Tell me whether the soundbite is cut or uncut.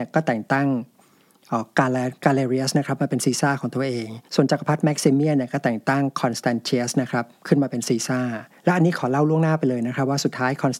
cut